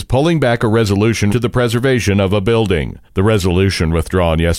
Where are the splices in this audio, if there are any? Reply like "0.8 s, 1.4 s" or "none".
1.3 s, 3.1 s

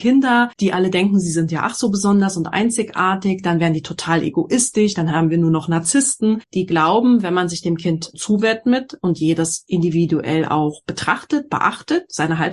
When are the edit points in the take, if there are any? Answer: 8.1 s

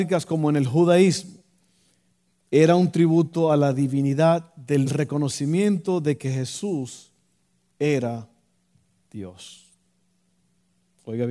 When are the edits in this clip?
4.9 s

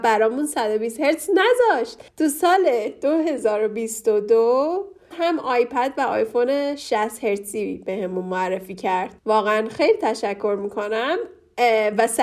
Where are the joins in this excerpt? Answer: 2.1 s, 5.1 s, 9.2 s

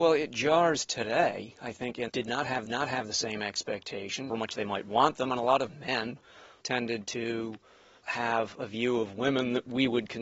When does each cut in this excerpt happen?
2.1 s, 2.7 s, 4.3 s

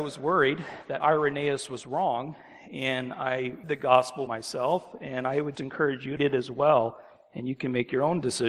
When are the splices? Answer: 1.0 s, 3.6 s, 4.3 s, 5.5 s, 6.2 s

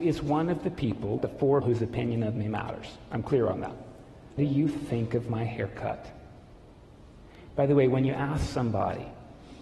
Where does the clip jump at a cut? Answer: 1.2 s, 1.6 s, 4.4 s

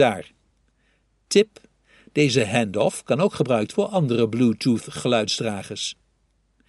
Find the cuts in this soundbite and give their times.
3.7 s

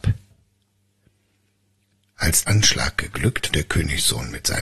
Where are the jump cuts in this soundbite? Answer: 2.4 s, 3.5 s

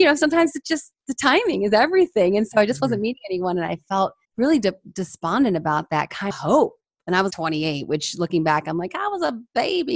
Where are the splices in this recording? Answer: 4.2 s, 6.3 s, 7.3 s

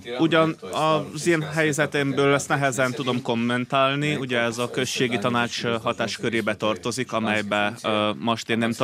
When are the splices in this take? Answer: none

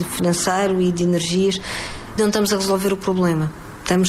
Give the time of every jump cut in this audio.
2.2 s

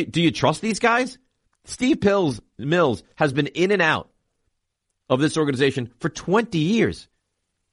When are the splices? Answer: none

